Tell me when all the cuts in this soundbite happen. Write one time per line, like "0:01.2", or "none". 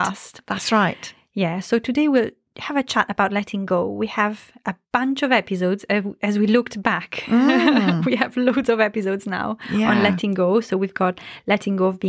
none

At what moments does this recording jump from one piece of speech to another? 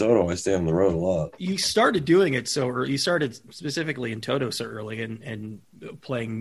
0:03.5

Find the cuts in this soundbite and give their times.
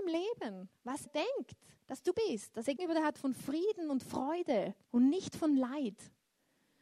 0:01.1
0:01.8
0:02.1
0:02.8
0:04.8

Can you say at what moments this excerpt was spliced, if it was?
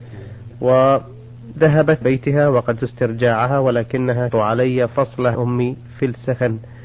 0:02.0
0:02.8
0:04.3
0:05.3

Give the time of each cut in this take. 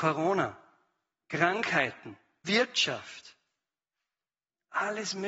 0:02.4

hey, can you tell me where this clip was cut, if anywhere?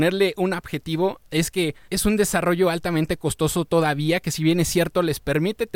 none

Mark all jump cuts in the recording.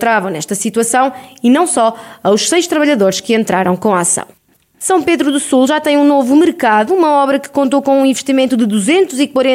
none

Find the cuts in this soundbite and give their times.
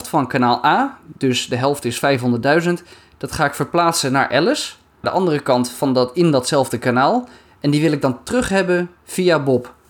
0:05.0

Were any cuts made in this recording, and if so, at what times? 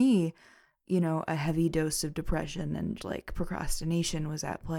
0:03.0

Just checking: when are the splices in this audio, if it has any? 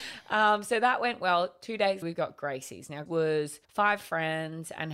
0:02.0
0:03.1
0:03.6

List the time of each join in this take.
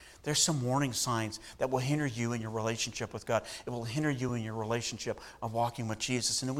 none

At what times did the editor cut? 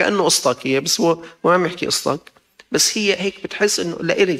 none

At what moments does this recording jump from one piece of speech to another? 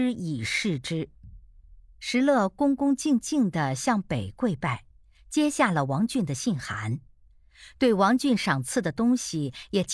none

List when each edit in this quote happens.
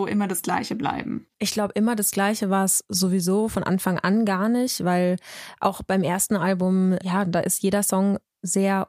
0:01.3

